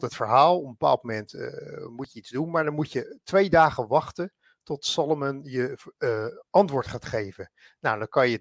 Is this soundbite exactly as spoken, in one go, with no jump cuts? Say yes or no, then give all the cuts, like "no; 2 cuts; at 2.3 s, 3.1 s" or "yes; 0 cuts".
yes; 0 cuts